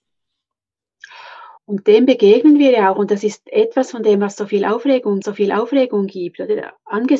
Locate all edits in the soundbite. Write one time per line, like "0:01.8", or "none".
0:01.6
0:05.2